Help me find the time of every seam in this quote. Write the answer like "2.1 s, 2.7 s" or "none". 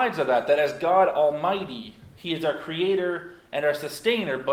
none